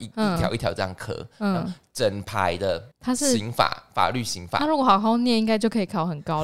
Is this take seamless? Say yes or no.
no